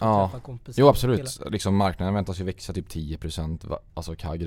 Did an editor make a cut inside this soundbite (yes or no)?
no